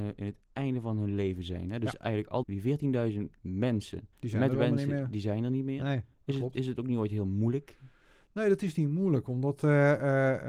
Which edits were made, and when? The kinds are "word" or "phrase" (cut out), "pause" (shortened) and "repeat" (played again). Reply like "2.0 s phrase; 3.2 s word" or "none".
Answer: 2.4 s word; 4.1 s pause; 6.1 s pause